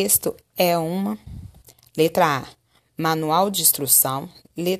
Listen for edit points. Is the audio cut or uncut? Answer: uncut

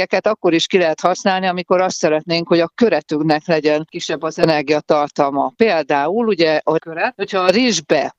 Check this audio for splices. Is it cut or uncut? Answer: cut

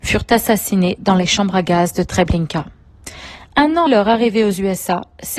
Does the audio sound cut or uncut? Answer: cut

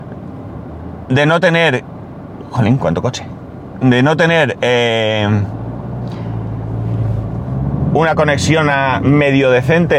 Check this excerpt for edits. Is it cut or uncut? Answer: uncut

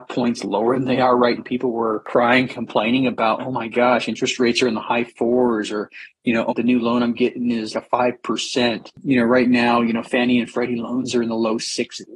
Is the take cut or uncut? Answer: cut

